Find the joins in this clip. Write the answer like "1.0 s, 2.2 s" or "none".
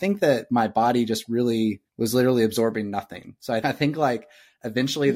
1.9 s, 3.6 s